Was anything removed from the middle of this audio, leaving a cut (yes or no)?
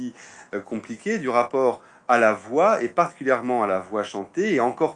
no